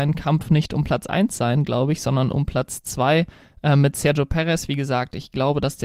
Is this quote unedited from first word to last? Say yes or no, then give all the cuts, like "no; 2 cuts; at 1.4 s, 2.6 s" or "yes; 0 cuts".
yes; 0 cuts